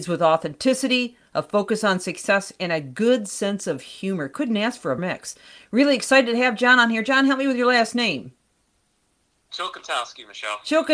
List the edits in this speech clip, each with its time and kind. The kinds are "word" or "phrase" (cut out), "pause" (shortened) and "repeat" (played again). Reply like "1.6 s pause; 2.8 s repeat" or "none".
5.0 s word